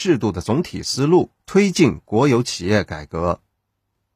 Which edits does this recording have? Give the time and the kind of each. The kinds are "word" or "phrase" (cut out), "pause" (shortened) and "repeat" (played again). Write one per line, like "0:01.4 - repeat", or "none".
0:01.4 - pause